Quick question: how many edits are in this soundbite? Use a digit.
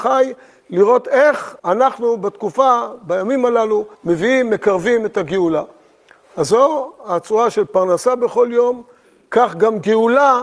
2